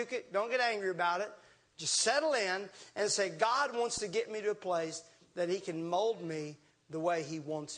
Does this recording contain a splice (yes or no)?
no